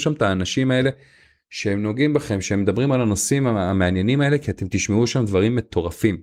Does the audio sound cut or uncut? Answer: uncut